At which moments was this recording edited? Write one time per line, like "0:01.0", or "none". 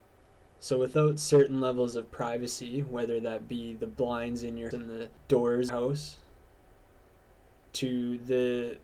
0:04.7
0:05.7